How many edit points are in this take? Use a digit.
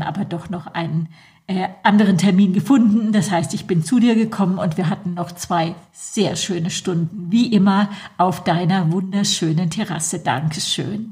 0